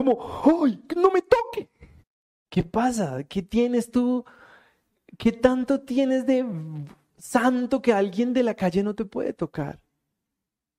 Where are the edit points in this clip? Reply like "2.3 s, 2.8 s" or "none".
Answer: 2.0 s